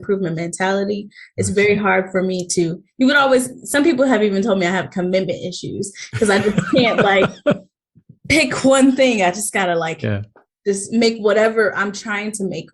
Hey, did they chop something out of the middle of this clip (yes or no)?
no